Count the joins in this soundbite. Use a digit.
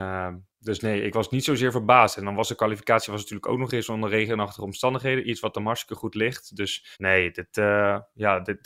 1